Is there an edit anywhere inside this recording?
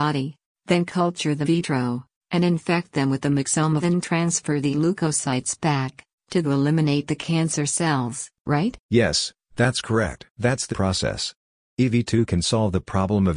yes; 7 cuts; at 1.4 s, 3.8 s, 4.7 s, 6.4 s, 8.8 s, 10.3 s, 10.7 s

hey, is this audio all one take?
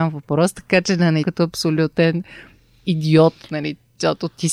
no; 1 cut; at 1.2 s

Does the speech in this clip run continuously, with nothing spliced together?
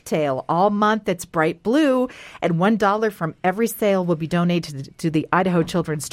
yes; 0 cuts

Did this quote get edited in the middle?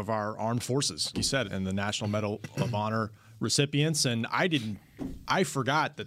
yes; 2 cuts; at 1.1 s, 1.4 s

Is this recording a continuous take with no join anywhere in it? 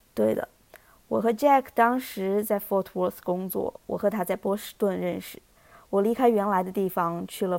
yes; 0 cuts

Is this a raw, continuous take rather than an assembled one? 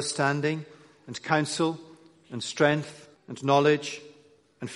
no; 1 cut; at 3.1 s

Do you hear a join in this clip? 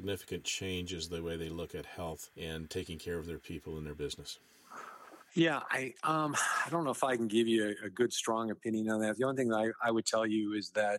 yes; 2 cuts; at 2.3 s, 5.2 s

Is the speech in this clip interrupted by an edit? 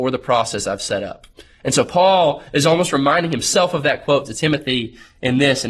no; 0 cuts

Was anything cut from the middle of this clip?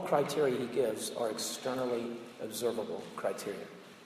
no; 0 cuts

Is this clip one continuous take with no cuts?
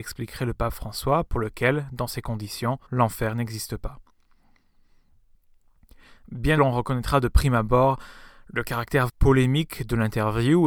no; 3 cuts; at 2.9 s, 6.6 s, 9.1 s

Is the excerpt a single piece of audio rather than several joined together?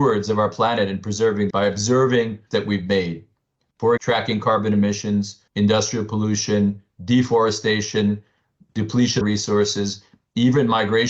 no; 5 cuts; at 1.5 s, 2.5 s, 4.0 s, 5.5 s, 9.2 s

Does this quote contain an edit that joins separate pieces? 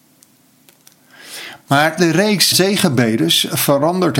yes; 2 cuts; at 2.0 s, 2.5 s

